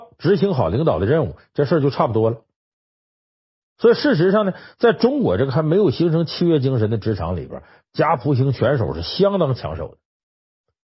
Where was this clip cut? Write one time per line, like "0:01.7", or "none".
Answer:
none